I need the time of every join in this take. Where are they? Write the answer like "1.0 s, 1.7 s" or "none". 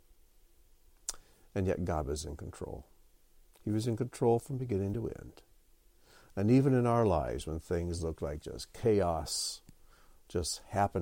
none